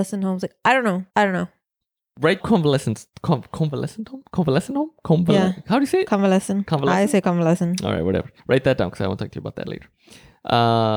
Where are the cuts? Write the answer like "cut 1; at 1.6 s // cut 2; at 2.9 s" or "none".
cut 1; at 1.1 s // cut 2; at 1.8 s // cut 3; at 2.4 s // cut 4; at 8.4 s